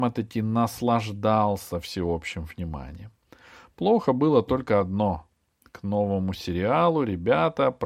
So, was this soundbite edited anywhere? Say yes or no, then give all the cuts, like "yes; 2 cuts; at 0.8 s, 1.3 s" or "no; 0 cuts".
no; 0 cuts